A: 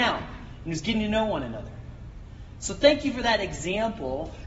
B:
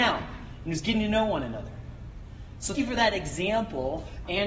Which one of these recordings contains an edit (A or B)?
B